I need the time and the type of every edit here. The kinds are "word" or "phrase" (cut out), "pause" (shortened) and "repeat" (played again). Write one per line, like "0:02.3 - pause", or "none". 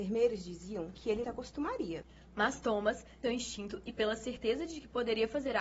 0:01.2 - phrase
0:03.2 - phrase